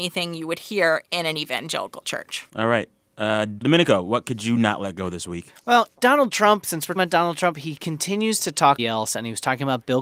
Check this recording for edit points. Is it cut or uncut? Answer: cut